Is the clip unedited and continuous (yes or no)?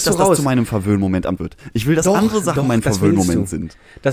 no